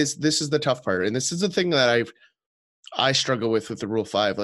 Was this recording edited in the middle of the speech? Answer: no; 0 cuts

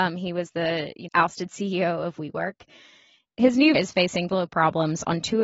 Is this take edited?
yes; 3 cuts; at 1.1 s, 3.7 s, 4.3 s

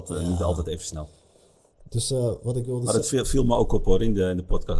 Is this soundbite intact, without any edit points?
yes; 0 cuts

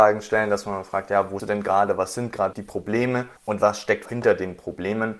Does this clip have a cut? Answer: yes; 4 cuts; at 1.4 s, 2.5 s, 3.4 s, 4.1 s

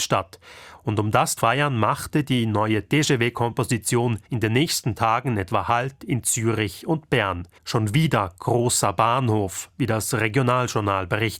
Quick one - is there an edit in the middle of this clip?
yes; 3 cuts; at 1.4 s, 4.2 s, 7.6 s

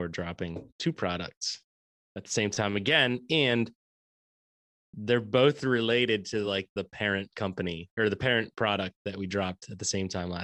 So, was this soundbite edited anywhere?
no; 0 cuts

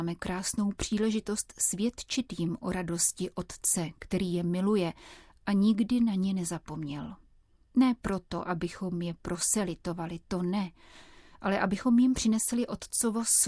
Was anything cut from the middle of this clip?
no; 0 cuts

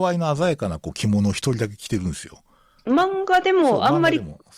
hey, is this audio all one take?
no; 1 cut; at 2.9 s

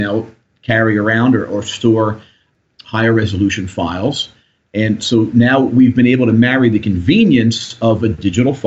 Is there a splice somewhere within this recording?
no; 0 cuts

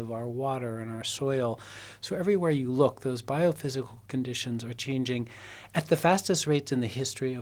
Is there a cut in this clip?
no; 0 cuts

